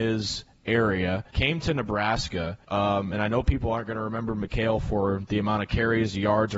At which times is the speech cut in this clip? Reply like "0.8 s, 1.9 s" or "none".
1.3 s, 2.6 s